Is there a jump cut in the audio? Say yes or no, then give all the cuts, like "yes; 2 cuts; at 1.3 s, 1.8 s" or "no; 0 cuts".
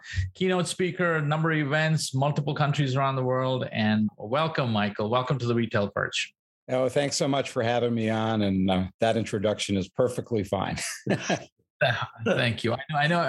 no; 0 cuts